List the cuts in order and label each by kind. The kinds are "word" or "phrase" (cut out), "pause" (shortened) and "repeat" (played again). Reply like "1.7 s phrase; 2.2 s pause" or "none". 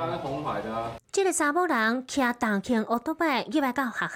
1.0 s pause